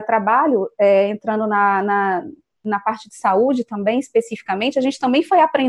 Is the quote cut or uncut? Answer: uncut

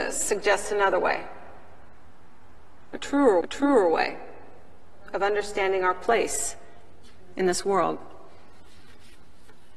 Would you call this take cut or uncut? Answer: cut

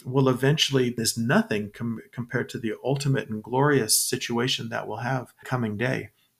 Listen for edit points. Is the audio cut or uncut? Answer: cut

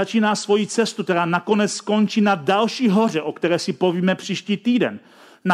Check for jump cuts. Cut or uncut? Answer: uncut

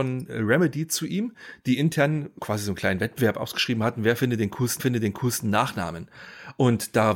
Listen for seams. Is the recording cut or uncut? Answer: cut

